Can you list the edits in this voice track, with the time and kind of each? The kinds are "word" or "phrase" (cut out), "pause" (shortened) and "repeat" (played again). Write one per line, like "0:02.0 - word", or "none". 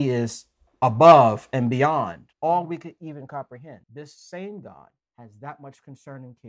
0:02.3 - pause
0:03.8 - pause
0:05.0 - pause